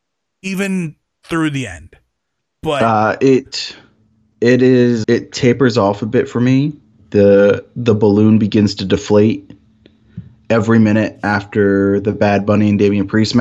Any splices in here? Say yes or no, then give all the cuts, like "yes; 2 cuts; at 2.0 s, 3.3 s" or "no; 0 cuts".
yes; 1 cut; at 5.0 s